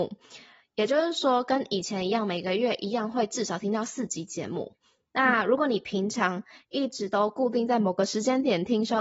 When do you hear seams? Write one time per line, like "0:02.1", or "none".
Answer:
none